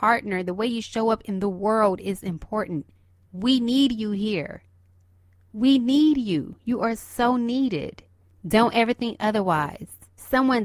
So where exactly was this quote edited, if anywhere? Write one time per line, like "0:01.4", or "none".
none